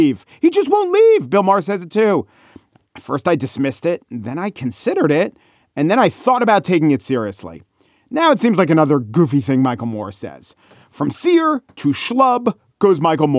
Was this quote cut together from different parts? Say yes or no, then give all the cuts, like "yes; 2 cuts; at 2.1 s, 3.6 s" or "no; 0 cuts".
no; 0 cuts